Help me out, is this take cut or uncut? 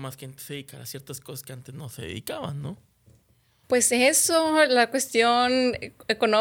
uncut